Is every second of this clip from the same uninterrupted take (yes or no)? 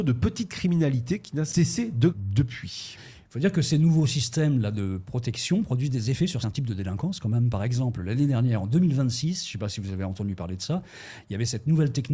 no